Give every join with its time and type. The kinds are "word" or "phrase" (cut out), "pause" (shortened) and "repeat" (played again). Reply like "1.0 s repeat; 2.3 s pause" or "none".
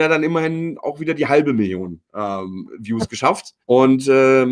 3.6 s pause